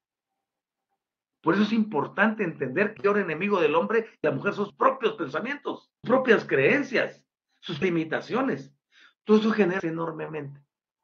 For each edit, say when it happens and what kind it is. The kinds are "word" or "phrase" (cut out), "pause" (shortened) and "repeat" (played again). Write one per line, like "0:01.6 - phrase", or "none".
0:03.0 - word
0:04.2 - word
0:04.7 - word
0:06.0 - word
0:07.8 - word
0:09.8 - word